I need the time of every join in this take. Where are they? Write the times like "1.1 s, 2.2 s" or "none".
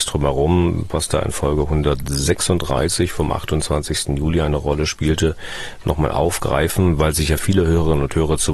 none